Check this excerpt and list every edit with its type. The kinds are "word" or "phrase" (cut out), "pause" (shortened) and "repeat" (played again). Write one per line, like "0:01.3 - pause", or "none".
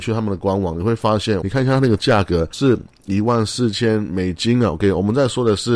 0:01.4 - phrase